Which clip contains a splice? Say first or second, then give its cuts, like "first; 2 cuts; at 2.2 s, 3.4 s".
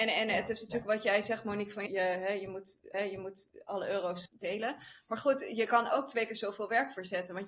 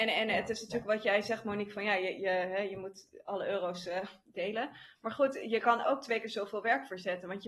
first; 3 cuts; at 1.9 s, 2.9 s, 4.2 s